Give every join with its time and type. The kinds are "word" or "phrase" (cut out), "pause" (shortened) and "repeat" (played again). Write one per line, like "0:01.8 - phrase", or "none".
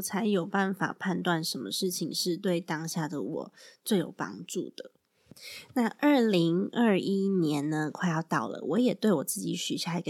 none